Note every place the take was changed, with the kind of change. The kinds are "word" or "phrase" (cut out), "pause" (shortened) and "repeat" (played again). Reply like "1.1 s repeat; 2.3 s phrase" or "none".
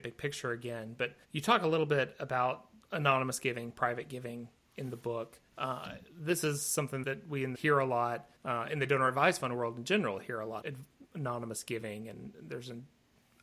1.2 s pause; 5.5 s pause; 7.0 s word; 7.5 s phrase; 8.4 s pause; 10.6 s word

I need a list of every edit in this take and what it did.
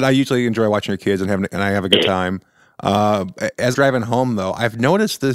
3.7 s word

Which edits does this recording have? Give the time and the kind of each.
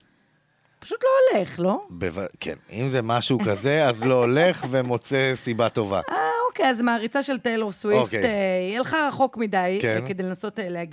none

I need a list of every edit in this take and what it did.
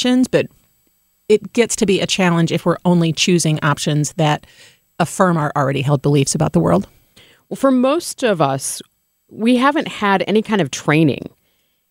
none

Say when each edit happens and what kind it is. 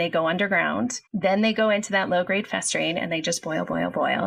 1.1 s pause

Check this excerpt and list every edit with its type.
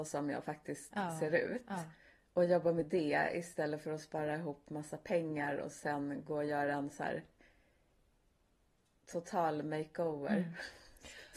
none

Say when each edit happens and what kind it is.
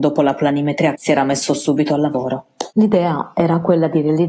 0.9 s word; 2.7 s pause

